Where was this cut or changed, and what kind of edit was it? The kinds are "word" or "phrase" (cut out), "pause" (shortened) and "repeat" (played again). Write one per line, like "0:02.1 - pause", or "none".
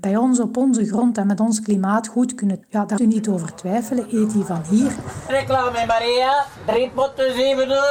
0:02.6 - word
0:03.0 - word
0:05.3 - word